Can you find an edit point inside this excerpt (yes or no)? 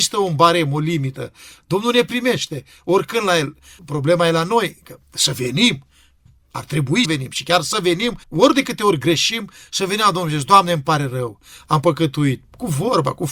yes